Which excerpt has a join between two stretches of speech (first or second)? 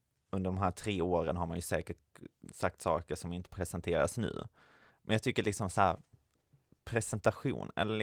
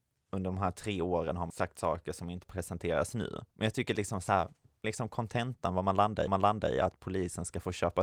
second